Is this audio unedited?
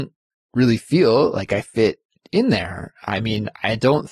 yes; 0 cuts

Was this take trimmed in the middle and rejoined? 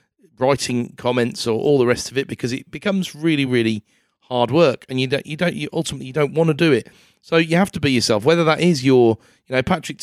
no; 0 cuts

